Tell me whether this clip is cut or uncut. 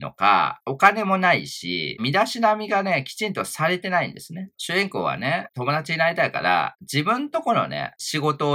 cut